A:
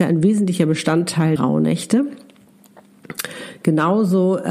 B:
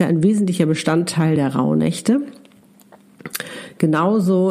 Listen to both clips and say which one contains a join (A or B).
A